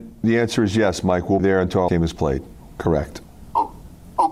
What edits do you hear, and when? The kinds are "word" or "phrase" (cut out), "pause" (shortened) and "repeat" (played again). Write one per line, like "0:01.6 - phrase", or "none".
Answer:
0:01.4 - word
0:01.9 - word

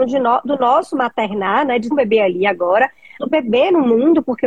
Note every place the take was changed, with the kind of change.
0:01.9 - word
0:03.2 - word

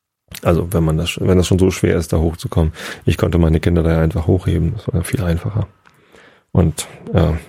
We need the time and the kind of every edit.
none

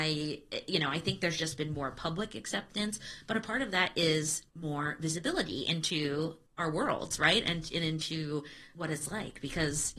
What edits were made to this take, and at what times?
0:04.5 - pause

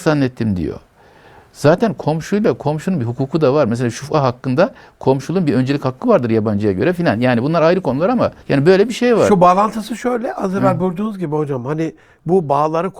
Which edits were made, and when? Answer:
0:08.4 - pause

